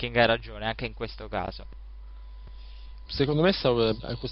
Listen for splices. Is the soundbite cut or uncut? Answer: cut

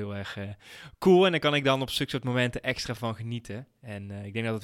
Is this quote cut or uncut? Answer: uncut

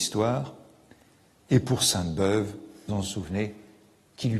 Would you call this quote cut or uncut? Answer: cut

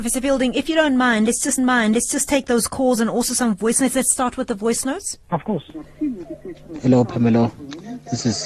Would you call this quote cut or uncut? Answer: cut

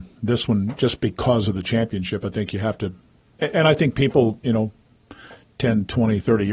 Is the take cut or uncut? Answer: uncut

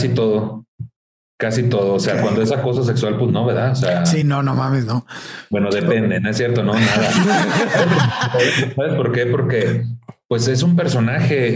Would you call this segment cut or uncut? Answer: uncut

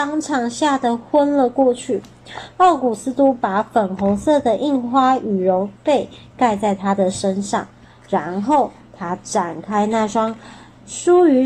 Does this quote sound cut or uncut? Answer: uncut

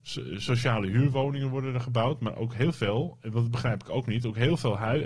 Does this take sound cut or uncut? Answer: uncut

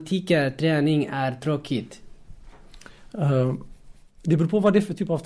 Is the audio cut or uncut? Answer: uncut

